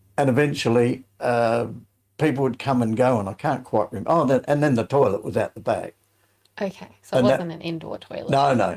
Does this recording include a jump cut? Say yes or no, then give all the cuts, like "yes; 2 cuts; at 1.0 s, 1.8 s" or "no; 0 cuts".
no; 0 cuts